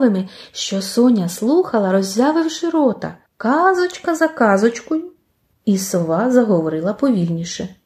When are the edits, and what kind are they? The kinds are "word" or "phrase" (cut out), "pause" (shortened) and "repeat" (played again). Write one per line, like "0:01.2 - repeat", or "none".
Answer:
0:03.3 - pause